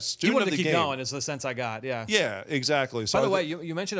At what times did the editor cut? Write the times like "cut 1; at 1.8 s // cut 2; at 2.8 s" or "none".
none